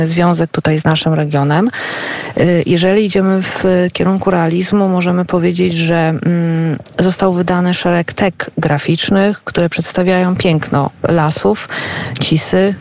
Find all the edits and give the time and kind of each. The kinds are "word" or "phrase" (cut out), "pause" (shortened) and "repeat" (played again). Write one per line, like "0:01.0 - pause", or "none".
none